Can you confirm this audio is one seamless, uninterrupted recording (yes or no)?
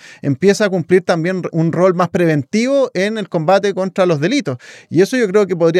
no